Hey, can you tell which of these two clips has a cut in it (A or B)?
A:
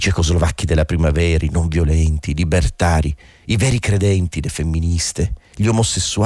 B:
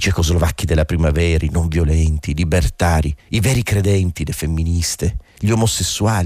B